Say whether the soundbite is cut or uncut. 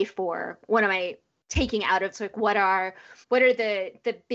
cut